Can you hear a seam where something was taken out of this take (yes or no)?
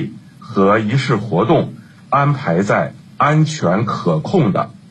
no